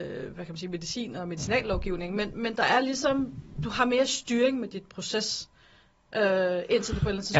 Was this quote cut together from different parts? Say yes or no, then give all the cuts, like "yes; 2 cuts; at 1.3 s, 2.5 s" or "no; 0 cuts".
no; 0 cuts